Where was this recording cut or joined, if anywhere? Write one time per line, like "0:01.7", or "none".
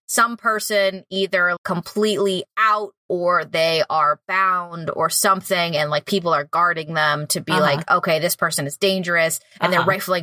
0:01.6